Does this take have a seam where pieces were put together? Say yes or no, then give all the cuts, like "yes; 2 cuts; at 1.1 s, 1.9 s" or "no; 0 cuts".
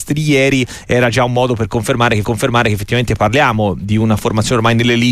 yes; 1 cut; at 2.2 s